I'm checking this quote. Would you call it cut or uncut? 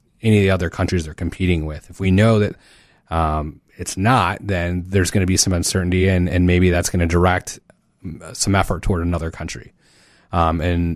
uncut